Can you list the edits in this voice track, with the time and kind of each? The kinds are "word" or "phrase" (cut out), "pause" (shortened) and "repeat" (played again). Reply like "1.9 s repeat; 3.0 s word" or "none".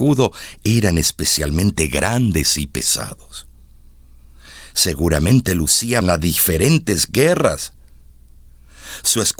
6.0 s phrase